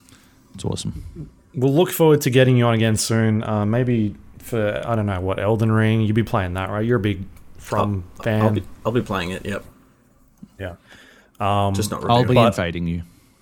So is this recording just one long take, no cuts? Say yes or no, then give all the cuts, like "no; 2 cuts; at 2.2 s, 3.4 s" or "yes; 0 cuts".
yes; 0 cuts